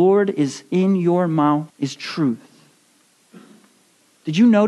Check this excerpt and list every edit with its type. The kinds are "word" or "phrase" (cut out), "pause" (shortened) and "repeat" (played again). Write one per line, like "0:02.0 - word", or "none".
0:01.7 - pause